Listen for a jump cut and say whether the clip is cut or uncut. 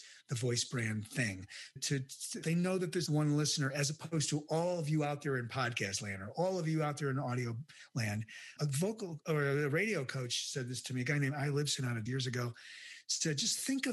cut